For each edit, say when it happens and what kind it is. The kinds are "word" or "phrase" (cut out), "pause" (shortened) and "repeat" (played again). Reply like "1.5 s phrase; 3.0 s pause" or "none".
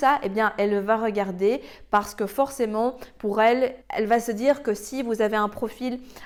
3.8 s pause

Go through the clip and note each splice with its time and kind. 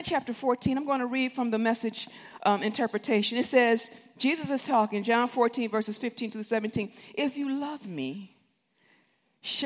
none

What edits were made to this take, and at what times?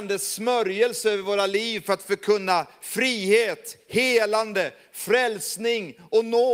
none

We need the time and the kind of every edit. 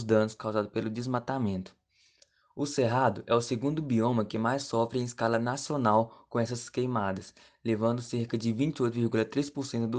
none

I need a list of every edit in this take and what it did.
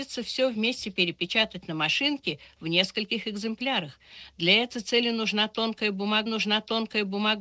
6.3 s repeat

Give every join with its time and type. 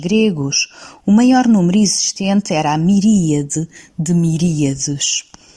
none

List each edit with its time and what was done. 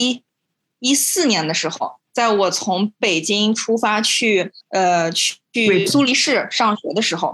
4.6 s pause

